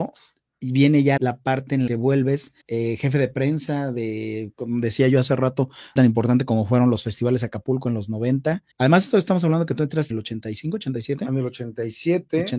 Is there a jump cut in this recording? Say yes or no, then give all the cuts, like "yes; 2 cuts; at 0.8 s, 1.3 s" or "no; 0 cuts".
yes; 6 cuts; at 1.2 s, 1.9 s, 2.6 s, 6.0 s, 8.7 s, 10.1 s